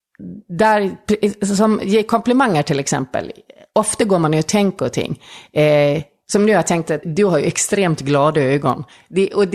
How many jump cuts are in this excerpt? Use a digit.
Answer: 2